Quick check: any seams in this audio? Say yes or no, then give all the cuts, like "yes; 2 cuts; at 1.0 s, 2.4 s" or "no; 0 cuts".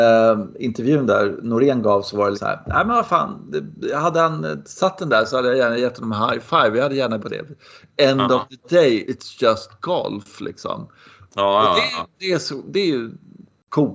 yes; 3 cuts; at 2.3 s, 7.2 s, 9.0 s